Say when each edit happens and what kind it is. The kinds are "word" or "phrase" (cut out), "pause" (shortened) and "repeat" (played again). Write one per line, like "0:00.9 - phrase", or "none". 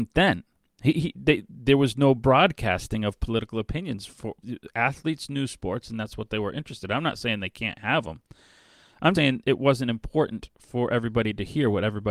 0:09.1 - word